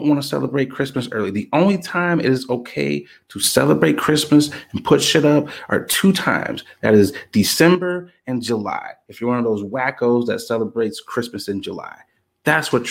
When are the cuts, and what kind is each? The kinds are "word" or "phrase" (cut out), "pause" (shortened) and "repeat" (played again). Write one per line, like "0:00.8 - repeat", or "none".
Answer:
none